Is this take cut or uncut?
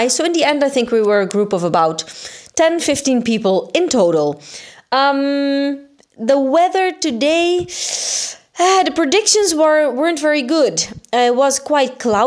uncut